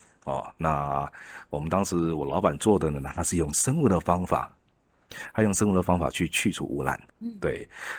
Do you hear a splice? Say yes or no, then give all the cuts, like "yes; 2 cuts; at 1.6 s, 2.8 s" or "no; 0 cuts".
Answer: yes; 1 cut; at 7.1 s